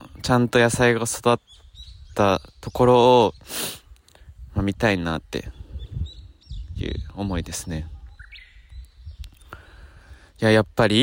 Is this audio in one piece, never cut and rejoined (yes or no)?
yes